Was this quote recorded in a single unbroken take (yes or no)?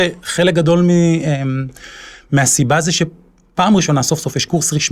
yes